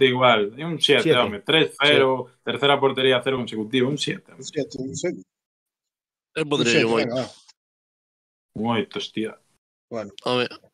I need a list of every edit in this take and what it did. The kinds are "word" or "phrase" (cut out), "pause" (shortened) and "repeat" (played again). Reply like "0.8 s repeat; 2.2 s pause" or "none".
none